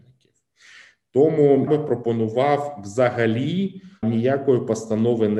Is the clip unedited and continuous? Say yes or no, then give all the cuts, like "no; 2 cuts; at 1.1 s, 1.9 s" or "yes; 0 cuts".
no; 2 cuts; at 1.7 s, 4.0 s